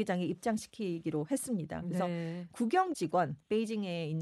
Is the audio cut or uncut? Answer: cut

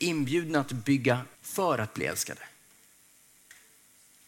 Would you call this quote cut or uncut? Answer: cut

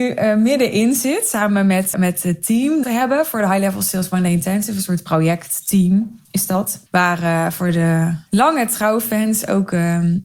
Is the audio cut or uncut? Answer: cut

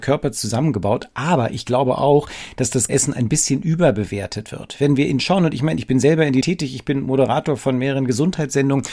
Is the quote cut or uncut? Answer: cut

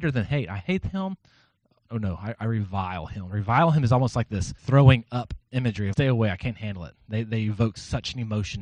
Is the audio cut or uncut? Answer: cut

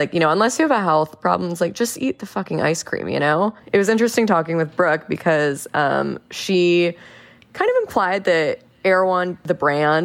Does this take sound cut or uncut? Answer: uncut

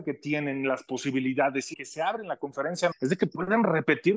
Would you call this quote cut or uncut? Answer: cut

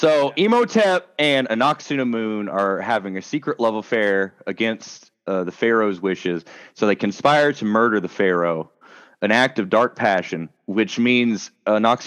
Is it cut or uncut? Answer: uncut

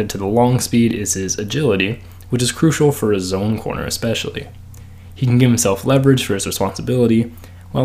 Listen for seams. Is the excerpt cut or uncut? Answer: uncut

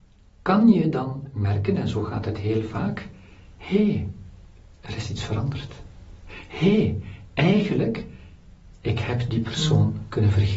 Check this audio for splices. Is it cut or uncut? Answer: uncut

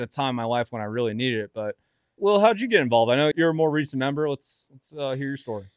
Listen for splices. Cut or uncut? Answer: cut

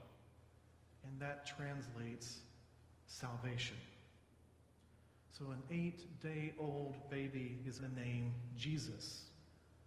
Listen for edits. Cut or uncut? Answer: cut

